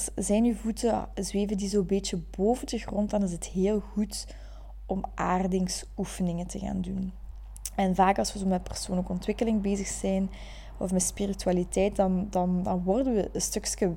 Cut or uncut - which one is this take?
uncut